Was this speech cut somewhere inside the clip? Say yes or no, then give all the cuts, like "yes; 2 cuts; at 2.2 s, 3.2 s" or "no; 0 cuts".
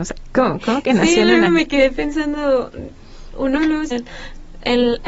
yes; 3 cuts; at 1.5 s, 3.6 s, 3.9 s